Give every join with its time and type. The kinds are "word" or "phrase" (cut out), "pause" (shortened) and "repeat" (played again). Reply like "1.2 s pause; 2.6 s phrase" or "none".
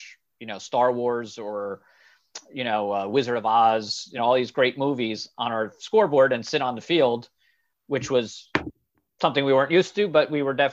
none